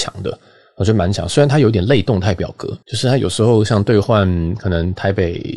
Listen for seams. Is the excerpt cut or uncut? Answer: cut